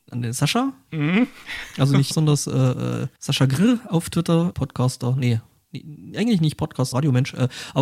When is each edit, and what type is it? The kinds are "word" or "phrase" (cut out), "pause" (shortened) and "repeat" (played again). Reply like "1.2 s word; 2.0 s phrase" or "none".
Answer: 2.1 s word; 3.2 s pause; 4.5 s phrase; 6.9 s word